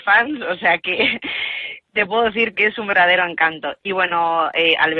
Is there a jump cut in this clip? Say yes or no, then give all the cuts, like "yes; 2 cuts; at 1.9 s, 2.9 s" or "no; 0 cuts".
no; 0 cuts